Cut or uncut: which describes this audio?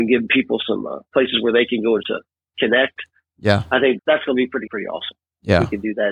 cut